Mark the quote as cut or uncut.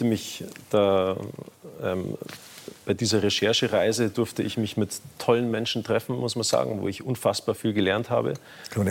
uncut